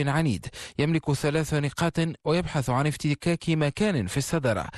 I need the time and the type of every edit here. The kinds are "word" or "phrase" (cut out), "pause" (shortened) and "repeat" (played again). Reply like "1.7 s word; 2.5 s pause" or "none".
none